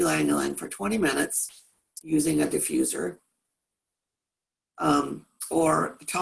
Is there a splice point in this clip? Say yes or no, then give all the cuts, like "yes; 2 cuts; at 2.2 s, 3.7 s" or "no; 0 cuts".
no; 0 cuts